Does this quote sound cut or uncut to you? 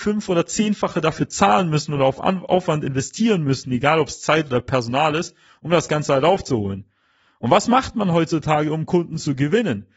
uncut